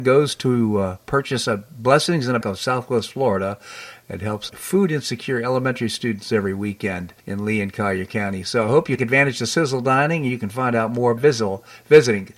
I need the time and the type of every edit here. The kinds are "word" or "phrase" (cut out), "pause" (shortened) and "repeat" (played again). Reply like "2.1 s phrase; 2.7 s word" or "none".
2.4 s word; 4.5 s word; 7.2 s pause; 9.0 s word; 11.2 s word